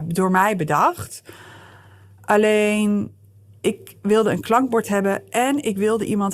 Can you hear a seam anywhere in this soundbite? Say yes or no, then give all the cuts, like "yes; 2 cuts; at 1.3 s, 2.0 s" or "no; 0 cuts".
no; 0 cuts